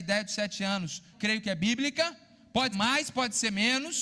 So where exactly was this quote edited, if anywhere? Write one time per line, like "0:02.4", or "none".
0:01.1
0:02.7